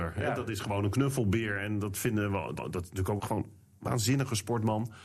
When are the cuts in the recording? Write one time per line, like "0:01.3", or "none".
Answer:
0:02.6
0:03.2